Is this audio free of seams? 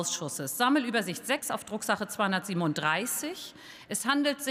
yes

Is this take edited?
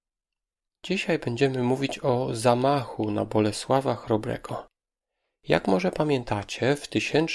no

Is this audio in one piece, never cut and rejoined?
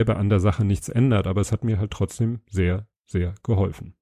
yes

